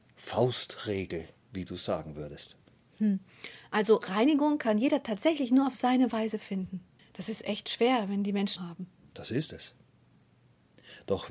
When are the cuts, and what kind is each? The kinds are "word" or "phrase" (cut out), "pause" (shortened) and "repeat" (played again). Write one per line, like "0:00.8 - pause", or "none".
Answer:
0:07.0 - pause
0:08.6 - phrase